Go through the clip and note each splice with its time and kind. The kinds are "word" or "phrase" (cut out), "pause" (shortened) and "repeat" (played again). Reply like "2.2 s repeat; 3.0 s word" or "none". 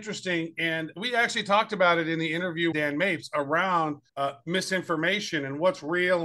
2.7 s word; 4.1 s pause